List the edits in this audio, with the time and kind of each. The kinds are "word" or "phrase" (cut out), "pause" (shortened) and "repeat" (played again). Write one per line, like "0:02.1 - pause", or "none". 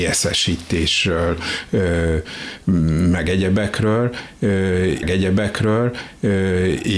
0:05.0 - repeat